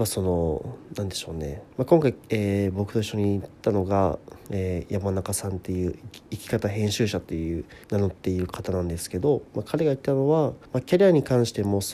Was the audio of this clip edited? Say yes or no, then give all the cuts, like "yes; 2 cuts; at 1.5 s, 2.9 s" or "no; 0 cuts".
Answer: yes; 5 cuts; at 1.7 s, 2.2 s, 7.8 s, 9.5 s, 10.7 s